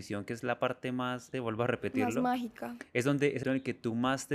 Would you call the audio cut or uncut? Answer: cut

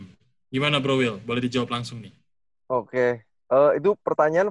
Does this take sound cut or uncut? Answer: uncut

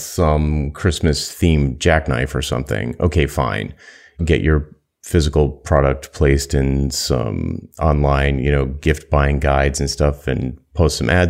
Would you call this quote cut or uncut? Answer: uncut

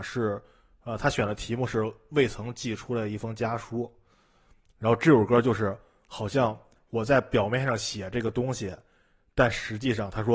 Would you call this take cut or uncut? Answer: uncut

